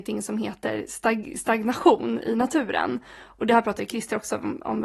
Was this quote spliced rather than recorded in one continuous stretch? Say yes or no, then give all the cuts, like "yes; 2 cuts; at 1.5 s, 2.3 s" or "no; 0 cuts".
no; 0 cuts